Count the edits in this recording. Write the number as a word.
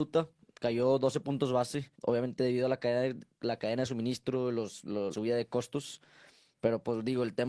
two